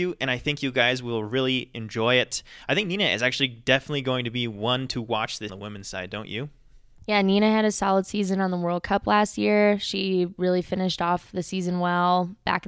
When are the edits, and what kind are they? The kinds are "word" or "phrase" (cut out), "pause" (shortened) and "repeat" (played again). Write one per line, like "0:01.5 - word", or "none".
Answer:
0:05.5 - phrase